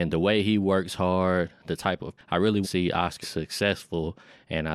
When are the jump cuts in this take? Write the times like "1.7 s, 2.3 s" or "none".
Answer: 2.2 s, 2.6 s, 3.2 s